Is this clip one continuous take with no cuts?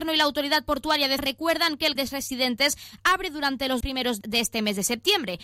no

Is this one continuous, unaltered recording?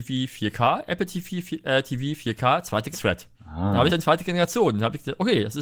no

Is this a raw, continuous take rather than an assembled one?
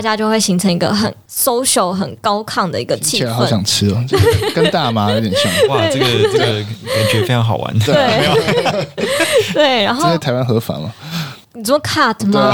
yes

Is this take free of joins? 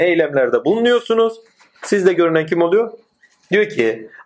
yes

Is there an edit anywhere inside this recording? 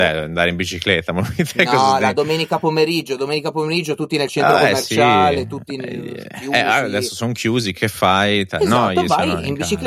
no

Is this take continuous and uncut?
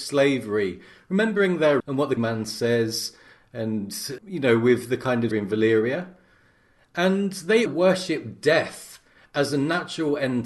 no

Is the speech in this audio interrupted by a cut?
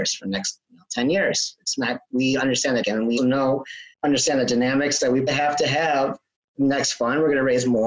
yes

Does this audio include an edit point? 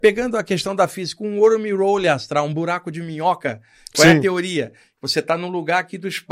no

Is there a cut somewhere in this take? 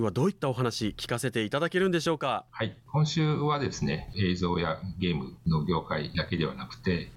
yes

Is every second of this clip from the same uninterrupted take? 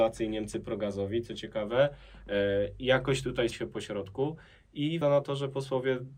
no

